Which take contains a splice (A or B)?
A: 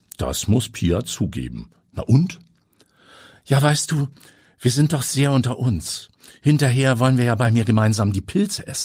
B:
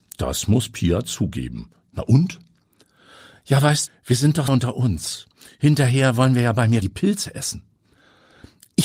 B